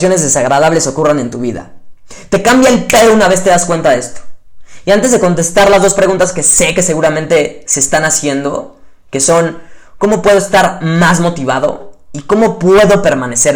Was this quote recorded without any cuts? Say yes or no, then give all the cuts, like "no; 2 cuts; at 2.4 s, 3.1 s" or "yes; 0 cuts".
yes; 0 cuts